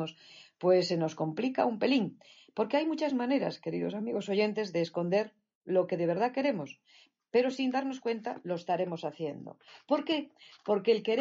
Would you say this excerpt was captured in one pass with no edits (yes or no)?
yes